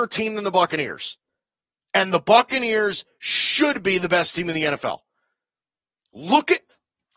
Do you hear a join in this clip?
no; 0 cuts

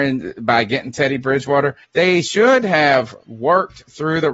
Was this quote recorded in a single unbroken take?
no; 1 cut; at 1.8 s

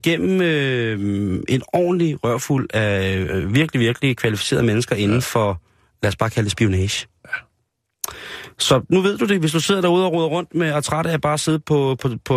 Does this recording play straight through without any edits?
yes; 0 cuts

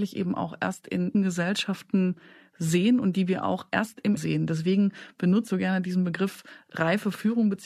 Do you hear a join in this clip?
yes; 3 cuts; at 1.1 s, 4.2 s, 5.5 s

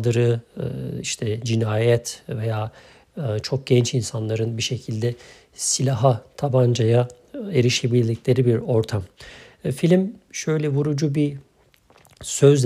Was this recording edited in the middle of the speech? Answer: no; 0 cuts

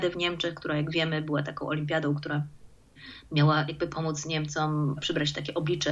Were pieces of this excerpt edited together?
no; 0 cuts

